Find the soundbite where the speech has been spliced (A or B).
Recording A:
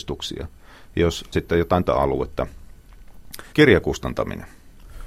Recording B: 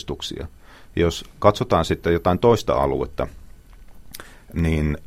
A